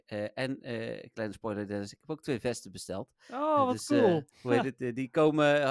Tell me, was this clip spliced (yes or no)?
yes